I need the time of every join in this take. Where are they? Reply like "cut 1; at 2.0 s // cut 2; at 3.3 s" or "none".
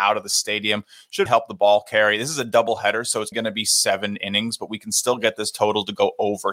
cut 1; at 1.3 s // cut 2; at 3.3 s

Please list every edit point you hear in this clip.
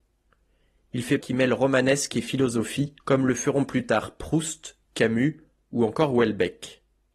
cut 1; at 1.2 s // cut 2; at 3.0 s

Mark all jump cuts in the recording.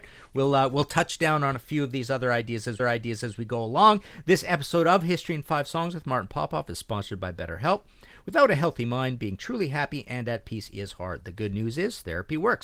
cut 1; at 2.8 s

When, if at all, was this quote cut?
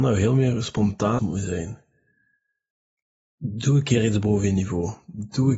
cut 1; at 1.2 s

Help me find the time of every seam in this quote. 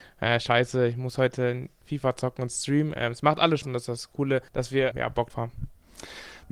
cut 1; at 1.8 s // cut 2; at 3.6 s // cut 3; at 4.5 s // cut 4; at 4.9 s // cut 5; at 5.3 s

